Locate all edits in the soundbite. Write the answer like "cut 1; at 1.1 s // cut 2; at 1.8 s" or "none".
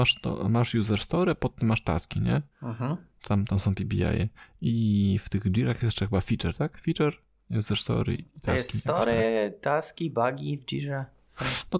cut 1; at 2.5 s